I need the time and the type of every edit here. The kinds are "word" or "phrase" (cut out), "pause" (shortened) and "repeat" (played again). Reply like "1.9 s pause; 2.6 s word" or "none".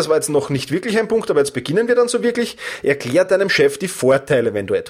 none